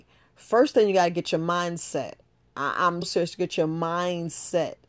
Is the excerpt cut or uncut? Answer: cut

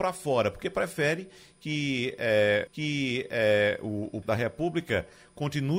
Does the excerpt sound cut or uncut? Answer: cut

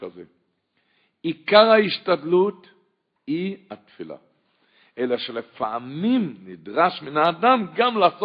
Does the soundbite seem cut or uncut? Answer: uncut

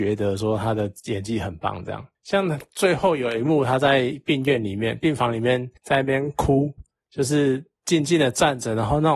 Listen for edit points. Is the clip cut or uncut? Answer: uncut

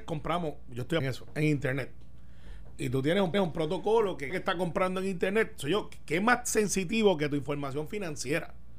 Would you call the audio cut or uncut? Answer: cut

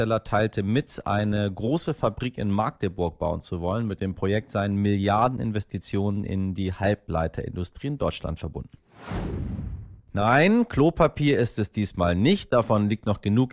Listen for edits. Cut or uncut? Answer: uncut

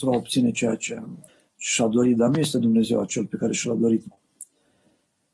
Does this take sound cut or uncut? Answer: cut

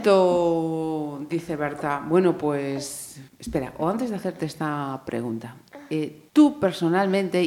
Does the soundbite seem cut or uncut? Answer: cut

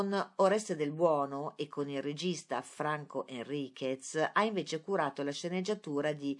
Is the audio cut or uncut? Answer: uncut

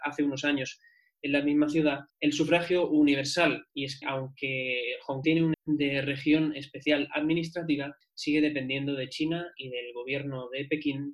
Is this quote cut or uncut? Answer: cut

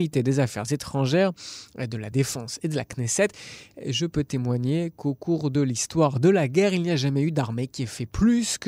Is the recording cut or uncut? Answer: uncut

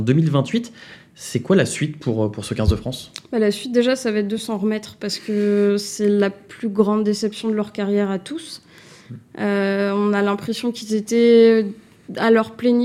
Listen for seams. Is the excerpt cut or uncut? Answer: uncut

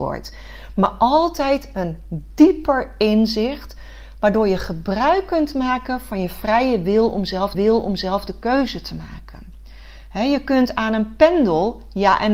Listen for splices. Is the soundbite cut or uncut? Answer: cut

